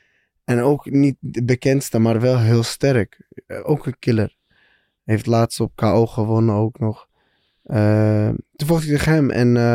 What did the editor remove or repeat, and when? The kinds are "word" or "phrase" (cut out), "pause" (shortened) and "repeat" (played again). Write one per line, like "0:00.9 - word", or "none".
none